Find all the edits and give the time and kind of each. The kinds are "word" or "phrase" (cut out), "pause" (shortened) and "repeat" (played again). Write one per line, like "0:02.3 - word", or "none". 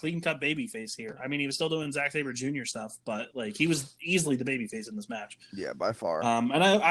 none